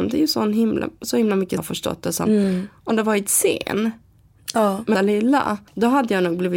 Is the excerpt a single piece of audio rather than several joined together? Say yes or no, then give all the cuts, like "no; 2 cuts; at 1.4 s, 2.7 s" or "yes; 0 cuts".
no; 4 cuts; at 1.6 s, 2.9 s, 4.9 s, 5.7 s